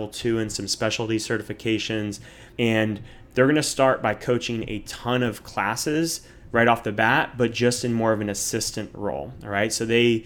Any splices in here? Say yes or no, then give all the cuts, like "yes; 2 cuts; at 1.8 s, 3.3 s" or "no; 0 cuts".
yes; 1 cut; at 2.5 s